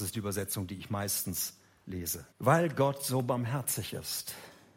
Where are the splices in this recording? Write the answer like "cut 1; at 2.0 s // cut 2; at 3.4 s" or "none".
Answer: cut 1; at 2.3 s